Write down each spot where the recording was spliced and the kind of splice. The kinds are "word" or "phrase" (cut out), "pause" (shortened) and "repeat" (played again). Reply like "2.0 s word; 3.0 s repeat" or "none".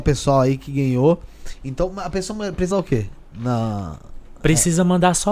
2.7 s word